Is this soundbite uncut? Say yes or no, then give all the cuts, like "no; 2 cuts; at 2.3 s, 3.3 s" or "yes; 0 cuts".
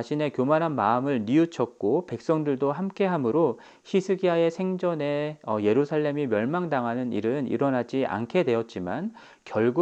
yes; 0 cuts